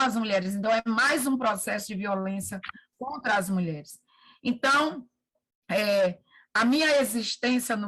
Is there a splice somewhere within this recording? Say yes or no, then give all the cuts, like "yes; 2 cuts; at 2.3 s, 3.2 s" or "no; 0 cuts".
no; 0 cuts